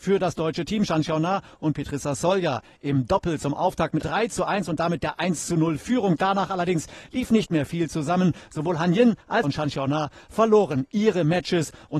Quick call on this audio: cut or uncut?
cut